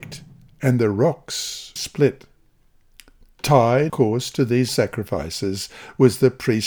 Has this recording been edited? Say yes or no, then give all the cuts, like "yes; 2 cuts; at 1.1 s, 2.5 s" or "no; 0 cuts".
yes; 3 cuts; at 1.8 s, 3.9 s, 4.7 s